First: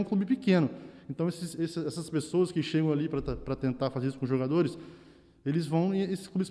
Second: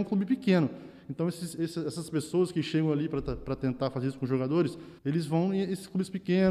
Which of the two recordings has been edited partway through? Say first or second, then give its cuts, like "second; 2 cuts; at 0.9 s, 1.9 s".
second; 1 cut; at 5.0 s